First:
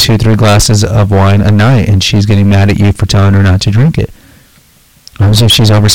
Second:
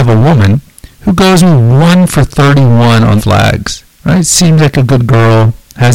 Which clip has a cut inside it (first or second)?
second